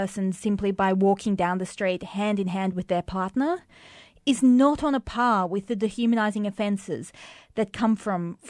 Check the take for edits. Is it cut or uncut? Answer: uncut